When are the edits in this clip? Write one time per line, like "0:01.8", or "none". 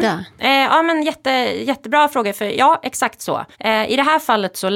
0:03.5